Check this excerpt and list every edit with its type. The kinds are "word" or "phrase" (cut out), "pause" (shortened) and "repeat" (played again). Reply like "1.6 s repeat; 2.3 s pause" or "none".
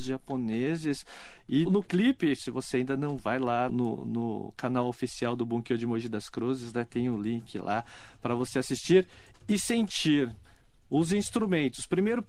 1.6 s word; 3.2 s word; 3.7 s word

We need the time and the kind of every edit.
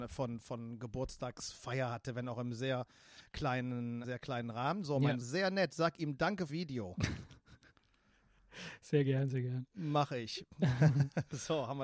4.0 s word; 5.2 s phrase; 6.5 s phrase

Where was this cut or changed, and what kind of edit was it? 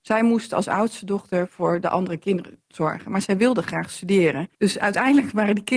2.6 s pause; 4.5 s pause

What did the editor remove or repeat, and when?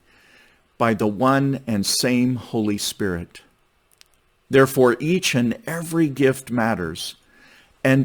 none

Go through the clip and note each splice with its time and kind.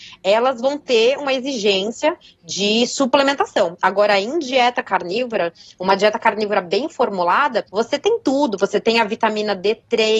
7.7 s pause

